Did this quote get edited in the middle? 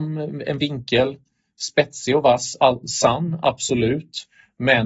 no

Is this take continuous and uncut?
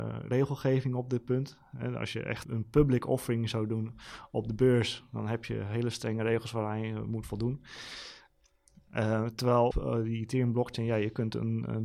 no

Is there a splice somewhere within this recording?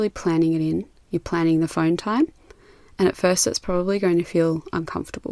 no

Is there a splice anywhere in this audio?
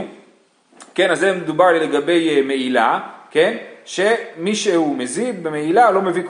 no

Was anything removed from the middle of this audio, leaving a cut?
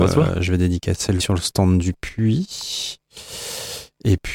yes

